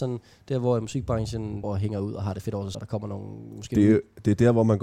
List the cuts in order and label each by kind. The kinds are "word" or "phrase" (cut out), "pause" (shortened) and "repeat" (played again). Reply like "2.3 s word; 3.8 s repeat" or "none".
1.6 s word; 2.7 s word